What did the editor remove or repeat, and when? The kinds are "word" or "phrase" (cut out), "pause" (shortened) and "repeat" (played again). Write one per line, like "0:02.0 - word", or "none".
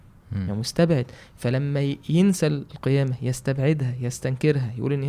none